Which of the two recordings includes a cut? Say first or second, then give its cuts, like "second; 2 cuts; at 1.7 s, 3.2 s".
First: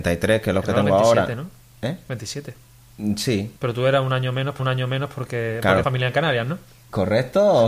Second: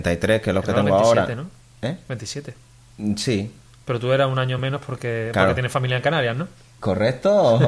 first; 3 cuts; at 3.6 s, 4.6 s, 5.8 s